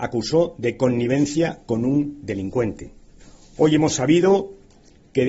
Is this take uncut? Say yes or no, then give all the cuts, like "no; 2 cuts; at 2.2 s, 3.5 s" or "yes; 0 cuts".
no; 1 cut; at 3.2 s